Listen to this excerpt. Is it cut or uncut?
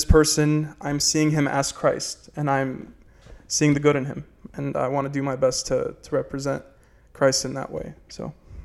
uncut